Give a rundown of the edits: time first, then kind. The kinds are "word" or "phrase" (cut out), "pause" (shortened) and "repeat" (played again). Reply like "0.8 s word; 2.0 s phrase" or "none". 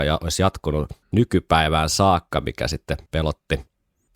1.0 s pause; 3.1 s pause